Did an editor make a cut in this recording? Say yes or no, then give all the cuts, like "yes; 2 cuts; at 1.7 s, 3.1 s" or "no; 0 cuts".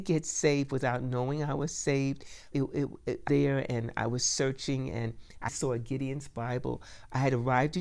yes; 3 cuts; at 2.5 s, 3.3 s, 5.5 s